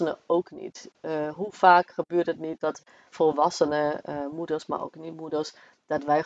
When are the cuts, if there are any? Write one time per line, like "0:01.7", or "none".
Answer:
0:03.1